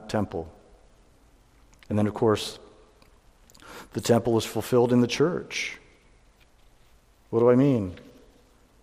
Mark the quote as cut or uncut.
uncut